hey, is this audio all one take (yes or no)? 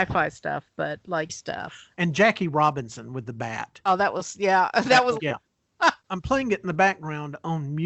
no